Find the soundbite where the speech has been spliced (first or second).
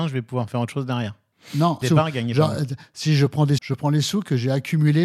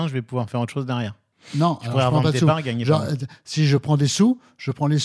first